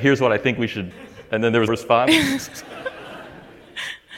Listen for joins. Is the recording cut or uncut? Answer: cut